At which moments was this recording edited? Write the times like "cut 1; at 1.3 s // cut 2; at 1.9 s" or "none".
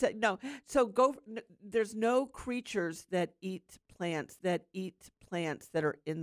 cut 1; at 4.4 s